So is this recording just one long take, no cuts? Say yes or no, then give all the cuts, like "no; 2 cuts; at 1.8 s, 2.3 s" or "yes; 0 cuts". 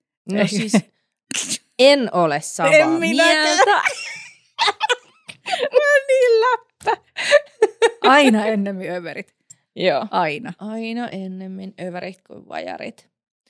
yes; 0 cuts